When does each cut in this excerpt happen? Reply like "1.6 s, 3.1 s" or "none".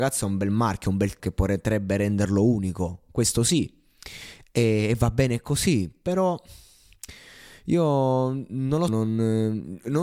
1.2 s, 8.9 s

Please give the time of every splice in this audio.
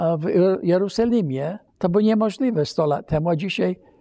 1.7 s

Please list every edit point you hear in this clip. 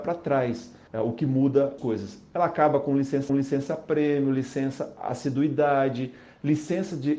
1.8 s, 3.3 s

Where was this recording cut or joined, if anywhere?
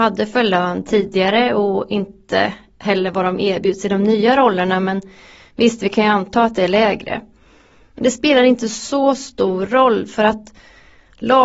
none

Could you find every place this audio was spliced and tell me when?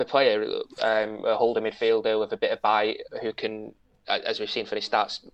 none

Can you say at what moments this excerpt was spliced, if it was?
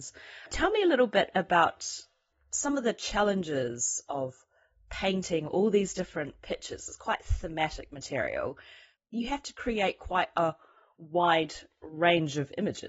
none

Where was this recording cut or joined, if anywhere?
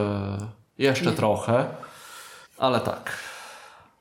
2.5 s

